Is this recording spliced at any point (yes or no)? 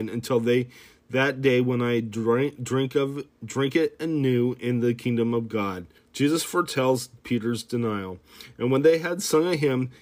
yes